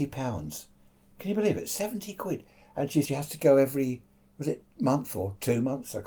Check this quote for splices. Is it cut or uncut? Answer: cut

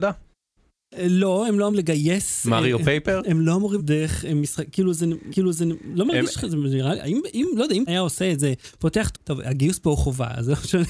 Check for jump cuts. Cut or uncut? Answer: cut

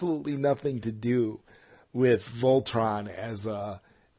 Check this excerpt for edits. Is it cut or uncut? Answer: uncut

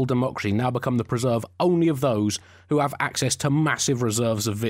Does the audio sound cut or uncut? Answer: uncut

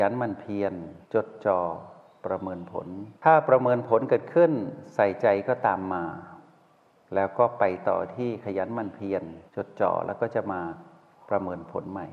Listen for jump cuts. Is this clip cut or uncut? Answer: cut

